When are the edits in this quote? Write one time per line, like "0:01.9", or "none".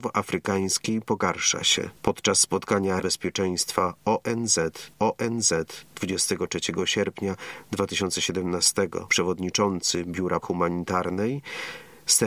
0:02.0
0:03.0
0:04.9
0:09.1
0:10.4